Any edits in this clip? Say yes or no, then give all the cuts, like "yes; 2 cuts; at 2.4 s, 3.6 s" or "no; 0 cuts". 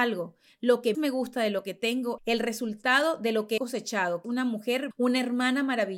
yes; 5 cuts; at 0.9 s, 2.2 s, 3.6 s, 4.2 s, 4.9 s